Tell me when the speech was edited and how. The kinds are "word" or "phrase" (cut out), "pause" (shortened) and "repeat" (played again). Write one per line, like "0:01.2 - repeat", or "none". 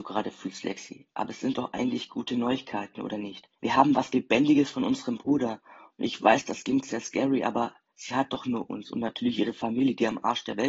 0:03.6 - pause